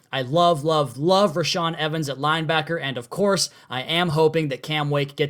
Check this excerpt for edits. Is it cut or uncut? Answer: uncut